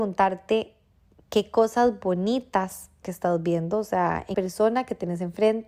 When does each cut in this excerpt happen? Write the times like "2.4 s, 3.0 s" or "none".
3.0 s, 4.3 s